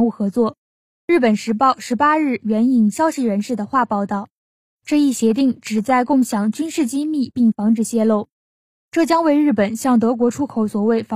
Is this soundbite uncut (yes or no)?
yes